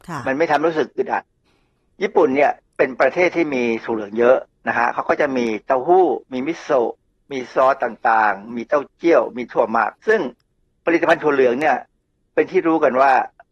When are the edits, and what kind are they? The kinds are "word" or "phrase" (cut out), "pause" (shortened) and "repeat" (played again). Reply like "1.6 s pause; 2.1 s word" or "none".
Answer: 10.0 s pause